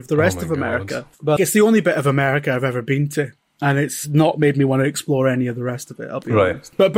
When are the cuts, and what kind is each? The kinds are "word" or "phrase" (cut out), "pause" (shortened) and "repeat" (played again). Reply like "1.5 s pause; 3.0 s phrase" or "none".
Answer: 1.4 s word